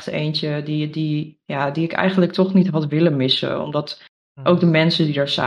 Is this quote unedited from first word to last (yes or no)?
yes